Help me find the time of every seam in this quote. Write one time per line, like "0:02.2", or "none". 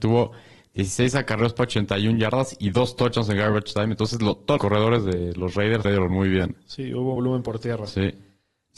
0:04.6
0:05.8
0:07.2

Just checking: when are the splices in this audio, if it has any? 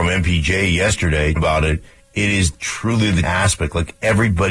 0:01.4
0:03.2

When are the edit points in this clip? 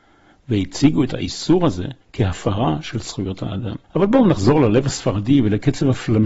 0:02.0
0:03.8

